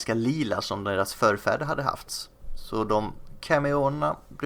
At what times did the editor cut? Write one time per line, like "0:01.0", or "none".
none